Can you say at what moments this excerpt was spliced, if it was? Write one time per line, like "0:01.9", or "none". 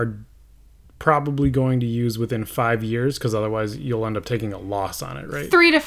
none

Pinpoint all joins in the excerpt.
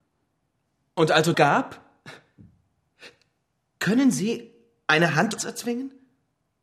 0:01.3
0:05.4

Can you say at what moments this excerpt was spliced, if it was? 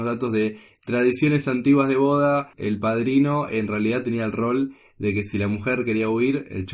none

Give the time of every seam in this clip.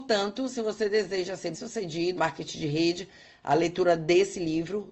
0:01.5
0:02.2

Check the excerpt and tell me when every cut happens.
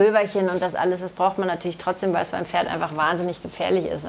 none

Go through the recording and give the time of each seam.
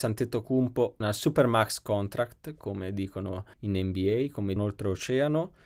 0:01.0
0:03.5
0:04.6

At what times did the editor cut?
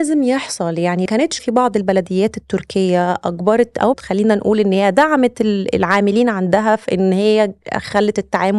0:01.1
0:01.4
0:03.9

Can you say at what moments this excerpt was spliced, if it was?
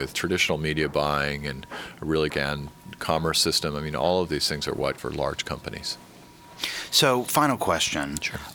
0:02.3
0:05.0

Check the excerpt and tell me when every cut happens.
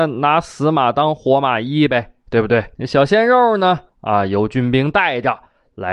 0:02.8
0:03.9

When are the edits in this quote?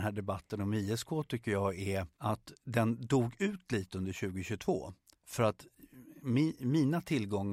0:02.1
0:05.1

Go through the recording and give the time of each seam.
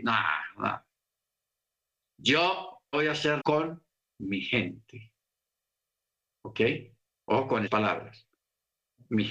0:02.9
0:03.4
0:07.1
0:07.7

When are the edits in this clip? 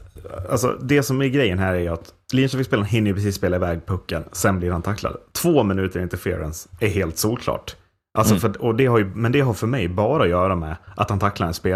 none

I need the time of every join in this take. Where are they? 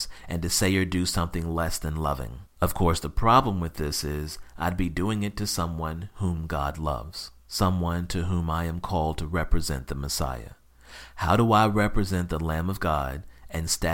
0:02.5
0:07.4

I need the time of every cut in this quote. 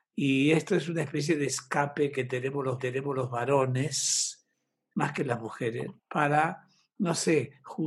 0:02.8
0:06.0

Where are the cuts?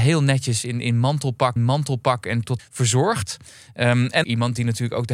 0:01.6
0:02.6
0:04.2

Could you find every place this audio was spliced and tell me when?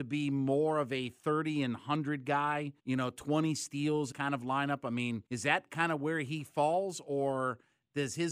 0:02.8
0:04.1
0:05.3

